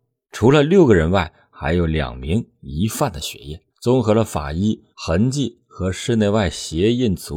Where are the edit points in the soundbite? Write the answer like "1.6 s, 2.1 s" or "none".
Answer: 3.7 s, 4.9 s